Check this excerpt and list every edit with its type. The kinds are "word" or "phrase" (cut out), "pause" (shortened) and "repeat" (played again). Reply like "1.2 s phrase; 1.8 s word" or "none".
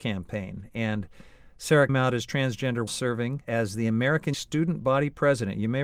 1.9 s word; 2.9 s word; 3.4 s word; 4.3 s word

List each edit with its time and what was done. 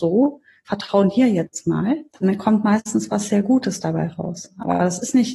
2.1 s pause

